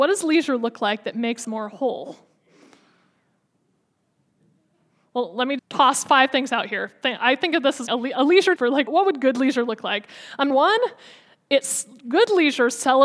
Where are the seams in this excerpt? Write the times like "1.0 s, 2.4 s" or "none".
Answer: 1.4 s, 5.6 s, 7.9 s, 8.6 s, 8.9 s, 10.5 s